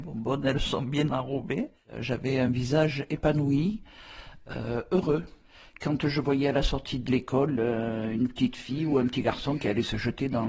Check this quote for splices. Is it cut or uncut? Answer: uncut